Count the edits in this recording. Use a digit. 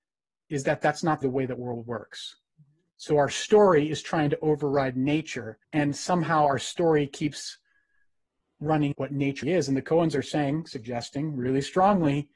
4